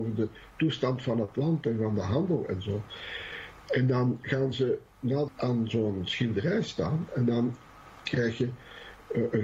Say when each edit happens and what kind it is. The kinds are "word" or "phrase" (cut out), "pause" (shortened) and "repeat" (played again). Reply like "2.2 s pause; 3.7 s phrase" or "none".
5.3 s word